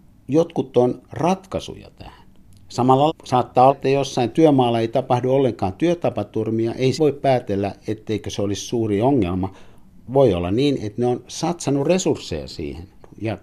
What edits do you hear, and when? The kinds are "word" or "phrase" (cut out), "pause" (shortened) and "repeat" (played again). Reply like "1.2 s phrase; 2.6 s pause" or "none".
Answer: 1.1 s word; 3.1 s word; 3.7 s word; 7.0 s word